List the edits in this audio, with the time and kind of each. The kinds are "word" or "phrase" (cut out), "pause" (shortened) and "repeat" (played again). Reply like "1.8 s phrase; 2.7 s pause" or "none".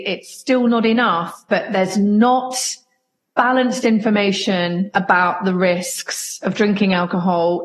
none